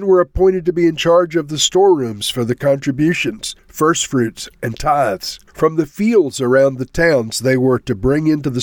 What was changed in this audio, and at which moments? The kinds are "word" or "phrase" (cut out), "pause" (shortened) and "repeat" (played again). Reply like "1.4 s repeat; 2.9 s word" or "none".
3.6 s pause; 5.5 s pause